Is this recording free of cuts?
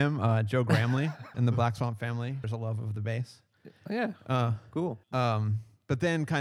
no; 4 cuts; at 1.3 s, 2.4 s, 3.8 s, 5.0 s

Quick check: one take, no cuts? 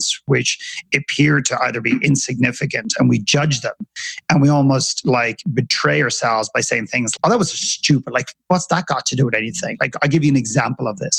no; 1 cut; at 7.2 s

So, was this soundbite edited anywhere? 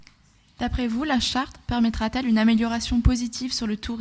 no; 0 cuts

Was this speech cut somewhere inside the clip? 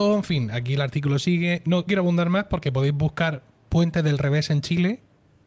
yes; 1 cut; at 1.9 s

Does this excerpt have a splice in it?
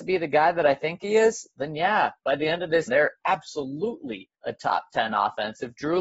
yes; 2 cuts; at 2.9 s, 4.3 s

